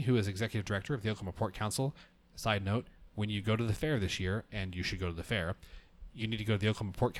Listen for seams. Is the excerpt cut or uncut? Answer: uncut